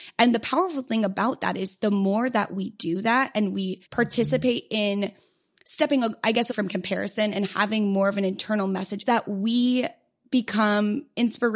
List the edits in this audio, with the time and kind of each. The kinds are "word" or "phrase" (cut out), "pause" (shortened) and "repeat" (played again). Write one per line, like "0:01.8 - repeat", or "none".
0:03.9 - pause
0:06.5 - word
0:09.1 - phrase